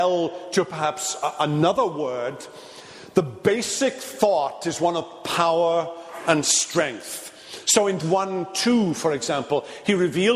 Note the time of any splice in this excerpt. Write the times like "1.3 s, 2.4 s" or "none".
8.0 s